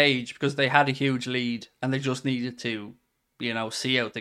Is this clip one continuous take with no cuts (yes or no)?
yes